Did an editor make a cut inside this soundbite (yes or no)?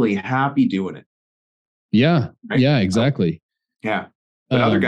no